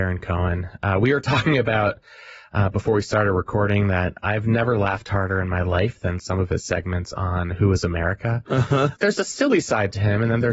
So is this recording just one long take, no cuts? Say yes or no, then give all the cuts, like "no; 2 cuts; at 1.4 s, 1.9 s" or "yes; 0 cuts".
yes; 0 cuts